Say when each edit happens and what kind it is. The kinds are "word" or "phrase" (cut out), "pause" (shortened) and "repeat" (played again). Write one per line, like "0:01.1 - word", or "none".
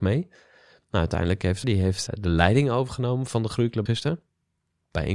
0:01.6 - phrase
0:02.1 - word
0:03.9 - word

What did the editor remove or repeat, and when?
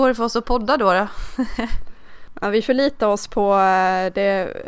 none

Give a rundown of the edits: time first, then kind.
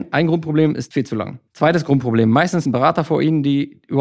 0:00.9 - phrase
0:01.5 - pause
0:02.7 - word

